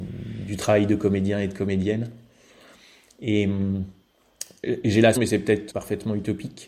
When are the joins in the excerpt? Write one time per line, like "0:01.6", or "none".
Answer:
0:05.2
0:05.7